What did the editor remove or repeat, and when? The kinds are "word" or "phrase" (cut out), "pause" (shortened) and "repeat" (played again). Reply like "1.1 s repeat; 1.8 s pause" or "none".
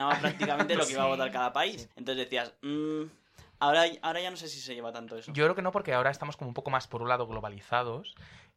1.9 s pause